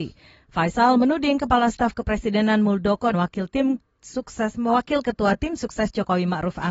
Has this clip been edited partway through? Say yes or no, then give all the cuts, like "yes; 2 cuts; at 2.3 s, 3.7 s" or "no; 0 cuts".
yes; 1 cut; at 3.1 s